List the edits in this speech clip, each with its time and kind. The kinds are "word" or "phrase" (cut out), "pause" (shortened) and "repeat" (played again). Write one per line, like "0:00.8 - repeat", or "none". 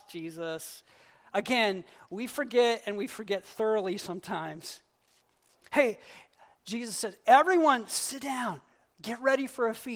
none